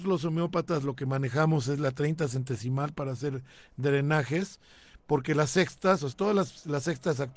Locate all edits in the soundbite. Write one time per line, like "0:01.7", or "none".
0:06.1